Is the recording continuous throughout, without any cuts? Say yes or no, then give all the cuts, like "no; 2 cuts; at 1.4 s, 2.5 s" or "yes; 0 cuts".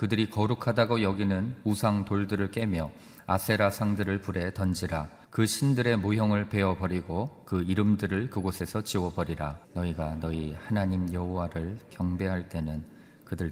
no; 2 cuts; at 5.2 s, 9.6 s